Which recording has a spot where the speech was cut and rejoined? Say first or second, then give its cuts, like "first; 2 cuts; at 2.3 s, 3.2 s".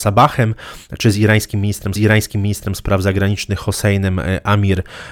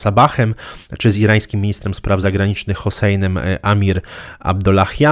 first; 1 cut; at 2.0 s